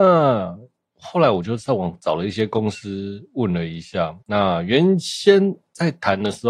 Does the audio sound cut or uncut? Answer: cut